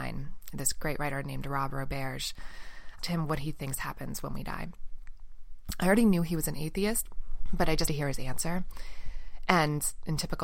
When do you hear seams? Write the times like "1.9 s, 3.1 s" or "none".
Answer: 3.0 s, 7.9 s